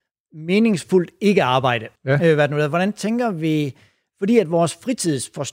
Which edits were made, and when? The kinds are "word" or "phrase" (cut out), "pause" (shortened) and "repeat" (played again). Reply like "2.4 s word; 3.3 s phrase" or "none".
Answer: 2.0 s pause